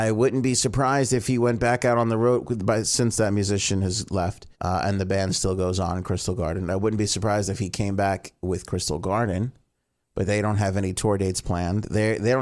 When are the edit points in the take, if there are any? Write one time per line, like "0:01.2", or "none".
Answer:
0:04.5

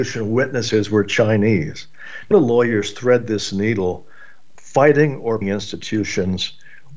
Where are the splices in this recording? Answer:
0:02.3
0:04.6
0:05.4

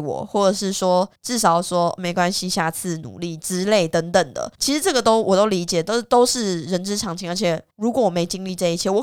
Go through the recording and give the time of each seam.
0:01.2
0:04.5
0:07.7

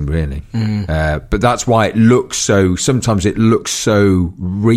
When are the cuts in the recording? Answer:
none

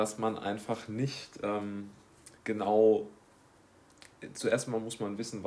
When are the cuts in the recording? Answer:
0:02.4

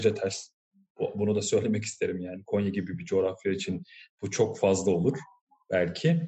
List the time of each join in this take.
none

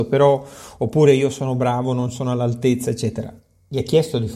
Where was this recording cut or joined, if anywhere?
none

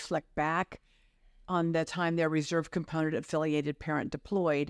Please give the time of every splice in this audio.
none

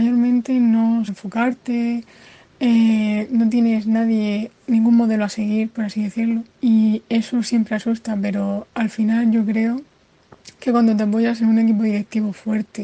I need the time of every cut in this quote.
0:01.1
0:04.6
0:06.5

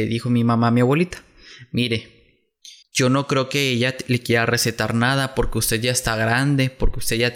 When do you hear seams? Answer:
0:02.8

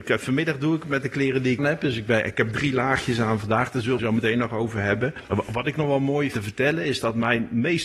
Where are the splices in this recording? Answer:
0:01.6
0:04.0
0:06.3

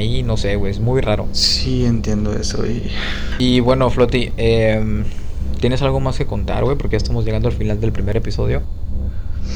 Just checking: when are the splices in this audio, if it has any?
none

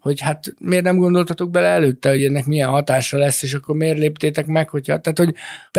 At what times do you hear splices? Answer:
none

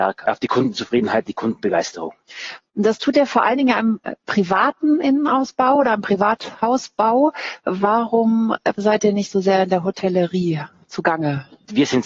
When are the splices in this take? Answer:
none

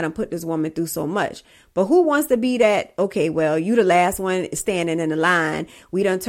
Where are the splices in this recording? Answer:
none

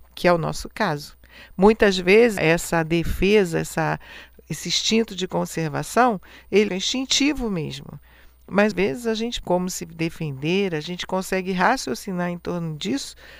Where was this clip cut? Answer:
0:02.4
0:06.7
0:08.7
0:09.4

